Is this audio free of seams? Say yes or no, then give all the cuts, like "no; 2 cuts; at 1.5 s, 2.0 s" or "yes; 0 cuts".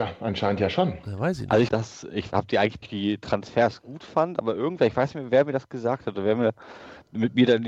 no; 2 cuts; at 1.7 s, 2.8 s